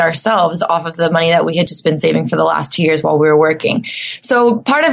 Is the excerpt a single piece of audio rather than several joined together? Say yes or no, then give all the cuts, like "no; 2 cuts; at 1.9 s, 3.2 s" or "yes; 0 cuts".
yes; 0 cuts